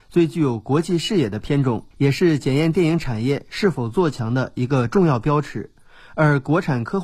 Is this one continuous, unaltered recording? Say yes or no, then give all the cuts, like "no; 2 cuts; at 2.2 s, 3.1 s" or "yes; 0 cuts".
no; 1 cut; at 1.9 s